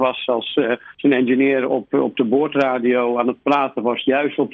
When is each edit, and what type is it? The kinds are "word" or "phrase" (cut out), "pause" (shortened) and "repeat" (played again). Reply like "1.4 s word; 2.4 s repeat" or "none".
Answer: 0.9 s pause